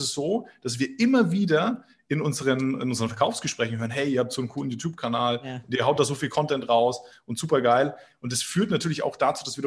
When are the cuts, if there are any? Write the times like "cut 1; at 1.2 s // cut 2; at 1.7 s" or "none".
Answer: none